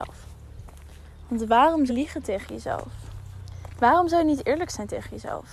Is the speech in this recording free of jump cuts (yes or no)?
no